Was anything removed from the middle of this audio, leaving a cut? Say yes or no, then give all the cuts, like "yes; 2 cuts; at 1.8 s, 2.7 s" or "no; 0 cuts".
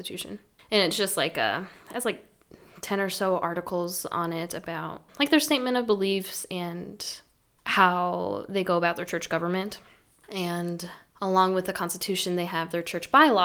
yes; 1 cut; at 5.1 s